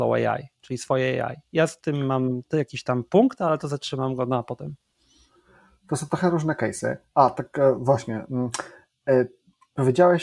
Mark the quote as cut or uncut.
uncut